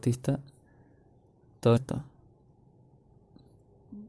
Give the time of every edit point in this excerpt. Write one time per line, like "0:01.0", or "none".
0:01.8